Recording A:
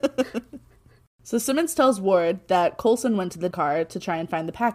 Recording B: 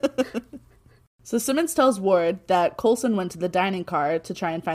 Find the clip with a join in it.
A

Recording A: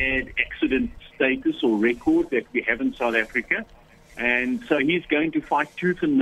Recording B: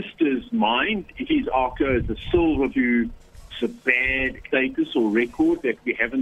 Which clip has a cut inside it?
B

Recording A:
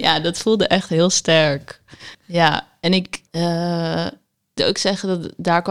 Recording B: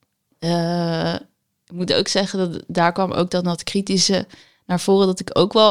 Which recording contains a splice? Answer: A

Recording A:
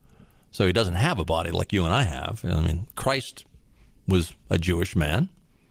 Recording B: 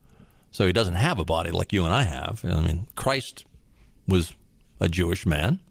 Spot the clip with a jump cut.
A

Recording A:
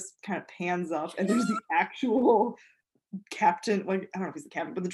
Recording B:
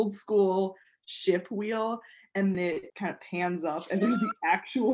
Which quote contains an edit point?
B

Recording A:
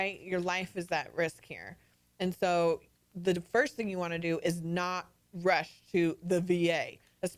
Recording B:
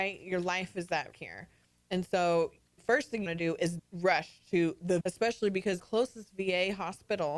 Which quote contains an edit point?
B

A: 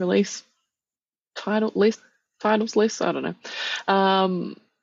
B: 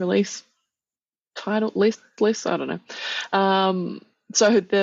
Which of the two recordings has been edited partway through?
B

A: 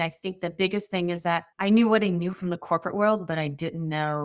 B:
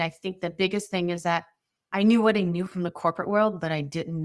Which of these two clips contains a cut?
A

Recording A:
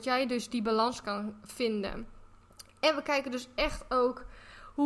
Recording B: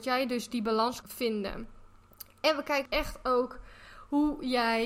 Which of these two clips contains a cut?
B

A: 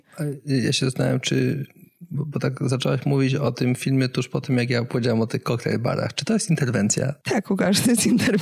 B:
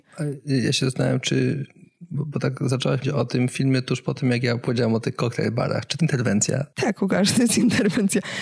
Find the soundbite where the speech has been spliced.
B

